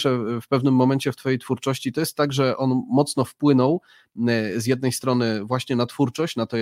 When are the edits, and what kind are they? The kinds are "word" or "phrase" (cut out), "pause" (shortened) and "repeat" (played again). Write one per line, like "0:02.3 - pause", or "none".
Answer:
none